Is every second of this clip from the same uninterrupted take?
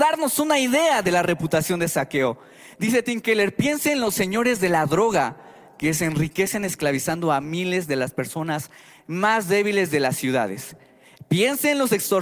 yes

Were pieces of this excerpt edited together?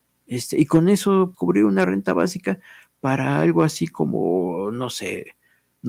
yes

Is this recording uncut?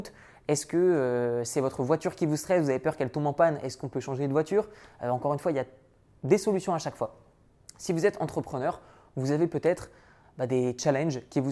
yes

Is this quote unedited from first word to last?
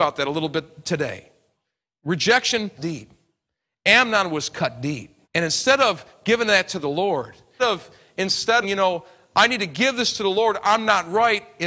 no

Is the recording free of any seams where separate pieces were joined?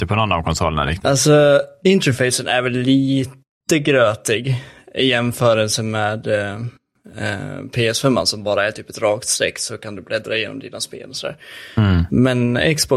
yes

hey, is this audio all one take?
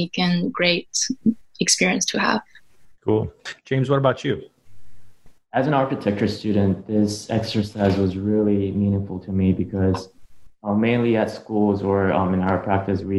yes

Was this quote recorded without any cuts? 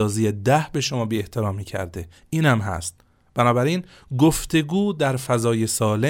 yes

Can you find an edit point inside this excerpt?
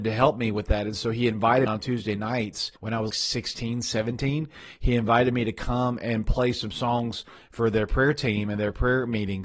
yes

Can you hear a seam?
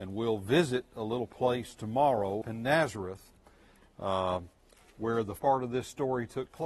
yes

